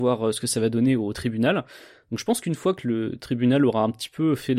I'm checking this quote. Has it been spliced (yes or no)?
no